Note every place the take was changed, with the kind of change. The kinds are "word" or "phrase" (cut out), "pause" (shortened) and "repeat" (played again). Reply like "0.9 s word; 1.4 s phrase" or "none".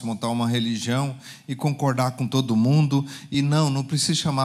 none